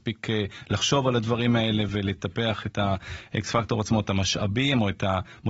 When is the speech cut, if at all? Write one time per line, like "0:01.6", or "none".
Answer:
none